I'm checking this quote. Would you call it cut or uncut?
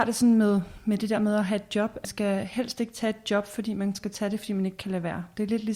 cut